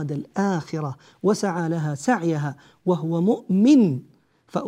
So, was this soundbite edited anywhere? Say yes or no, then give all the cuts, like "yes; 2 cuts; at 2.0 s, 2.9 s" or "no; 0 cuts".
no; 0 cuts